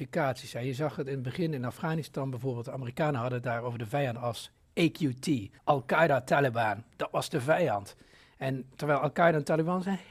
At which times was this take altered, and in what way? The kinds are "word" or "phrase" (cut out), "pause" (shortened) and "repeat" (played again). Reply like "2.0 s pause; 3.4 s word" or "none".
5.6 s pause

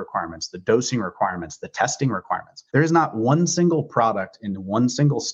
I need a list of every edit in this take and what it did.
2.7 s pause

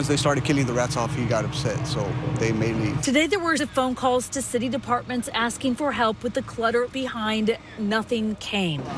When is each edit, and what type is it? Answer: 2.7 s word; 3.6 s word; 6.9 s word

